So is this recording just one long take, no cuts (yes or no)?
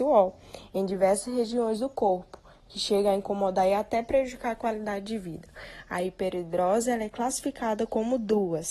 yes